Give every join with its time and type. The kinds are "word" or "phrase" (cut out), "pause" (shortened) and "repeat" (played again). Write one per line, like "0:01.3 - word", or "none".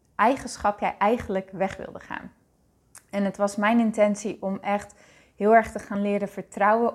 none